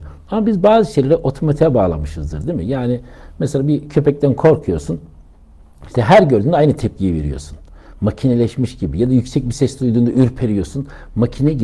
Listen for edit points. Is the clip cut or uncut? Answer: uncut